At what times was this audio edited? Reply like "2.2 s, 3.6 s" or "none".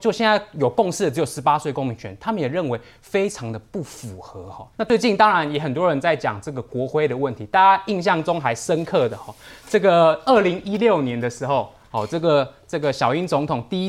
4.7 s